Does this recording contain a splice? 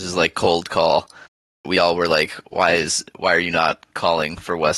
no; 0 cuts

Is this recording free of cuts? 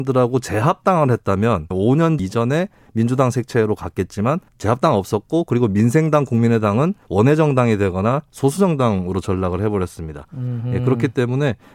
no; 4 cuts; at 1.7 s, 2.2 s, 4.5 s, 7.0 s

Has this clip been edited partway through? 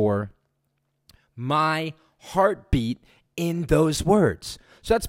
no; 0 cuts

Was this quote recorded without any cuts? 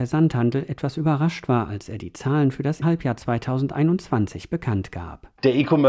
no; 1 cut; at 2.8 s

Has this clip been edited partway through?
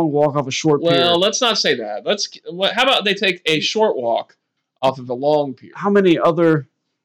no; 0 cuts

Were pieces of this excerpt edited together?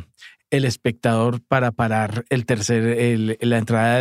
no; 0 cuts

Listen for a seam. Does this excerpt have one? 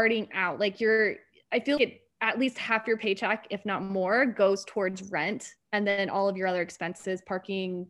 yes; 1 cut; at 1.8 s

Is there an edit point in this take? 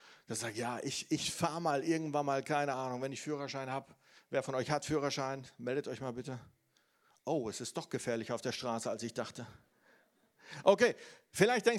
no; 0 cuts

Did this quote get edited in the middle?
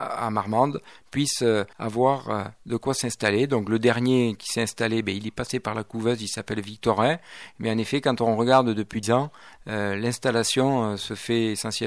yes; 2 cuts; at 1.7 s, 9.0 s

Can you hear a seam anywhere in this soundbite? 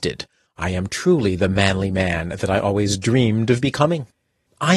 no; 0 cuts

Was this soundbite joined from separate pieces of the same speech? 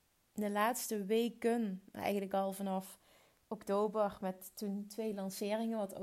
no; 0 cuts

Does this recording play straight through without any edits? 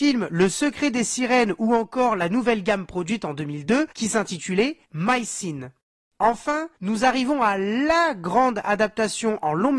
no; 3 cuts; at 3.9 s, 4.8 s, 6.8 s

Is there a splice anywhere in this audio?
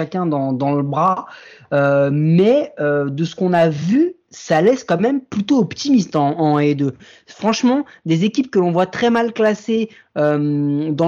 no; 0 cuts

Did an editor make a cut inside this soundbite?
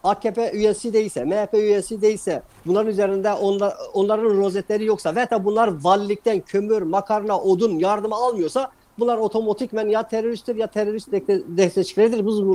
no; 0 cuts

